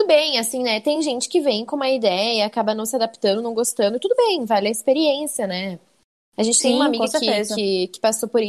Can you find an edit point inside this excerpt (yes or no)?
no